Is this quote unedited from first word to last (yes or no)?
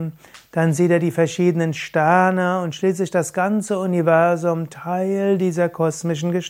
yes